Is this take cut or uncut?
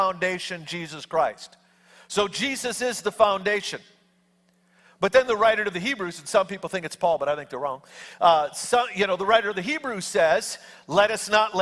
uncut